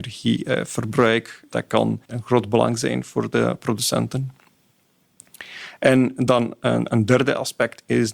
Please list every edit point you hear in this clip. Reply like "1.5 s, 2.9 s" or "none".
2.0 s